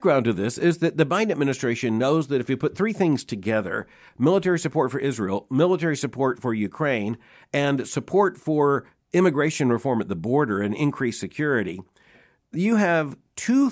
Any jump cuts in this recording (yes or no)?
no